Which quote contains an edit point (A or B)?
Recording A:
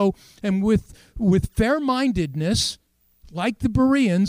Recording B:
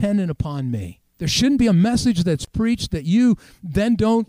B